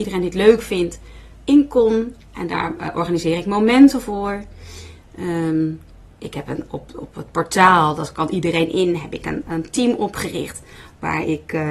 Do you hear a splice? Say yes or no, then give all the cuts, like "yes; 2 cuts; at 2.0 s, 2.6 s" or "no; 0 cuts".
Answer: no; 0 cuts